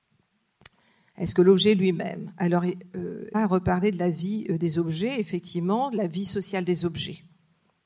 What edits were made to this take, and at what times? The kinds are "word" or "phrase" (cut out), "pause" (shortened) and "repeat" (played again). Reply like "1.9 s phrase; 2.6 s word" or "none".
3.3 s word

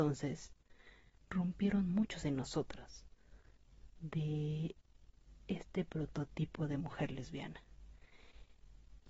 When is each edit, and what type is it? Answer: 2.2 s word

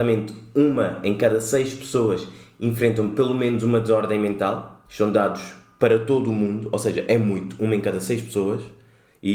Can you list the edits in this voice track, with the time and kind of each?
4.8 s pause

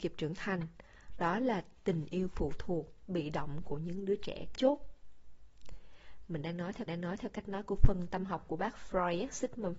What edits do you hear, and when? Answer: 4.5 s word; 6.9 s repeat

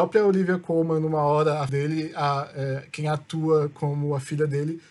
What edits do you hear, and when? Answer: 1.7 s word

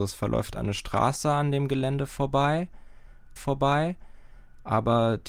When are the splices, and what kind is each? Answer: 3.4 s repeat

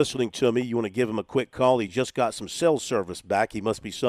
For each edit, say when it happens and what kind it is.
none

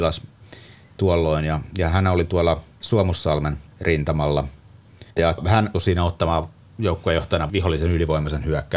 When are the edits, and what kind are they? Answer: 5.1 s pause; 5.7 s word; 7.5 s word

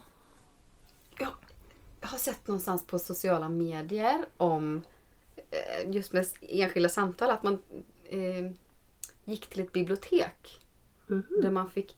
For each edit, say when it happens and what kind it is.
none

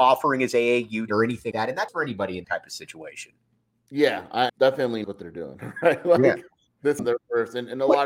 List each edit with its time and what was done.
1.1 s word; 1.5 s word; 1.9 s word; 2.4 s word; 4.5 s word; 5.0 s word; 7.0 s word

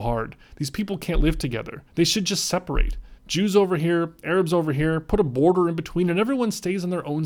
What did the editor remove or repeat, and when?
1.9 s pause; 3.2 s pause

